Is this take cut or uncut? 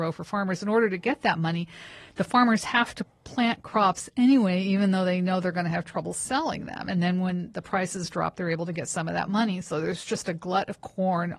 uncut